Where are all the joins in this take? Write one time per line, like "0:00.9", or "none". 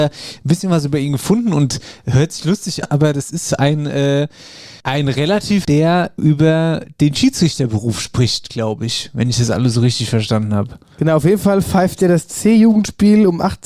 0:02.8
0:04.8
0:05.6
0:06.2